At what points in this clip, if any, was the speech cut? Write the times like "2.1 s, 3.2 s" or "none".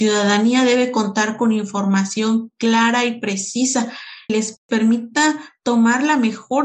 4.3 s